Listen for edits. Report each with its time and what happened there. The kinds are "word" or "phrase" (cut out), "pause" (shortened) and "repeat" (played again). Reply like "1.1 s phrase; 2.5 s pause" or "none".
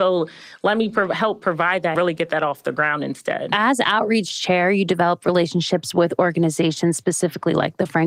1.9 s word